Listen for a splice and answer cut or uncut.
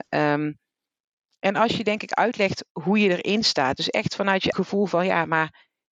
cut